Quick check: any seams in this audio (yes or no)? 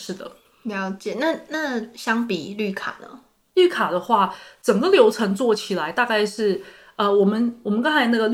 no